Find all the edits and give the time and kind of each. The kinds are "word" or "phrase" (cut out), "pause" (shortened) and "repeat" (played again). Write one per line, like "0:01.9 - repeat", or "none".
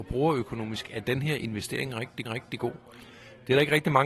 0:02.2 - repeat